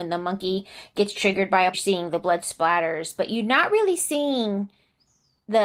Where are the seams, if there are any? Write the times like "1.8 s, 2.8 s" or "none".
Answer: 1.7 s